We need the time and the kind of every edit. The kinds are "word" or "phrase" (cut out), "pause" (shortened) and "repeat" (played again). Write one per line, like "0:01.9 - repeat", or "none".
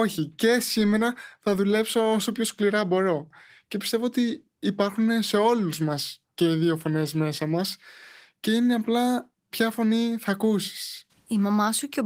none

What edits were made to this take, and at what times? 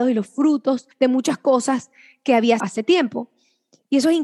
0:00.9 - pause
0:02.6 - word

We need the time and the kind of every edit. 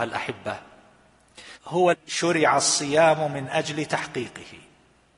0:01.6 - phrase
0:01.9 - word

